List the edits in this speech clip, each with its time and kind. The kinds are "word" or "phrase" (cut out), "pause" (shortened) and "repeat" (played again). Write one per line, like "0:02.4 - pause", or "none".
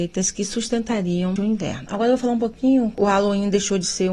0:01.4 - word
0:02.9 - word